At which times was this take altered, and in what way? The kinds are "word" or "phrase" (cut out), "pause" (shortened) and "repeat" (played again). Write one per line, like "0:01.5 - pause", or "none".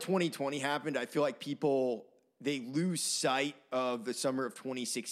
none

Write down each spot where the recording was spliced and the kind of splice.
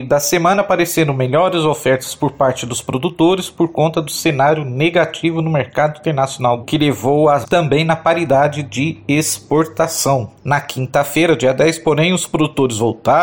0:06.6 - phrase
0:07.4 - word

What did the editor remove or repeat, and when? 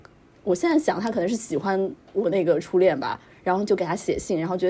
0:02.0 - pause

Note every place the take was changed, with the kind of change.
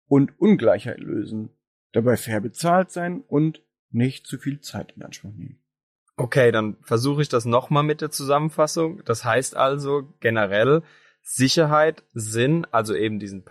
none

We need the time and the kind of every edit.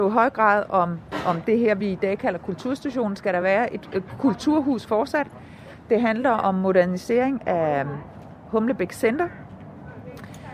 none

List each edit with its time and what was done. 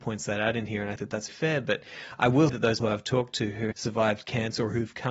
0:01.0 - word
0:01.3 - word
0:02.5 - word
0:02.8 - word
0:03.7 - word

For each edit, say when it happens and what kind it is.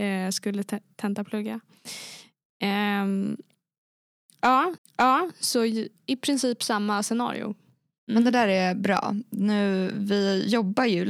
0:04.8 - repeat

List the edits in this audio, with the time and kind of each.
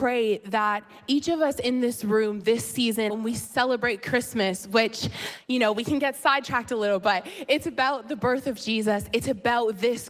0:03.1 - phrase

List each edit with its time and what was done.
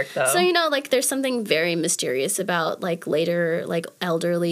none

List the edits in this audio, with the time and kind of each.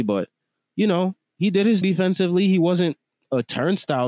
0:01.8 - word

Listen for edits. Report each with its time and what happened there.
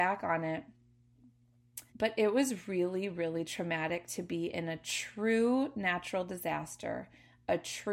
0:01.9 - pause

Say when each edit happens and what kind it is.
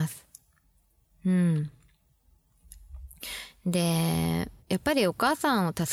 0:04.6 - pause

